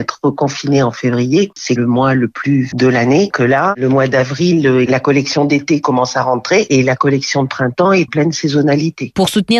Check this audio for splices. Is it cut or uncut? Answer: cut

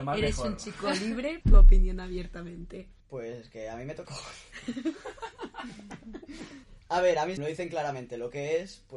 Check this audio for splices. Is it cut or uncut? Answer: cut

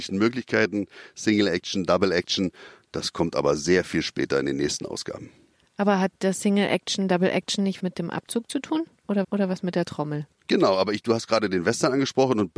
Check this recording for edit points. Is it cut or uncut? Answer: cut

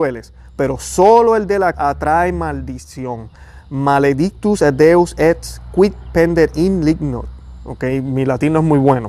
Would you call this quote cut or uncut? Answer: cut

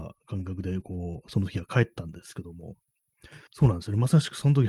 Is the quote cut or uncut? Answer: cut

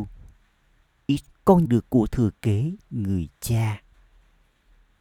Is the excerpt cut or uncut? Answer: cut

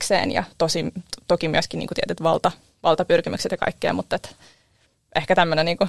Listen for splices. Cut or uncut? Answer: uncut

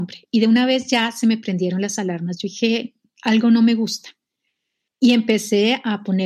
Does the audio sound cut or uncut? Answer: uncut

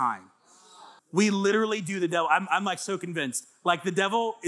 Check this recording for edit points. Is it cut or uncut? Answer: cut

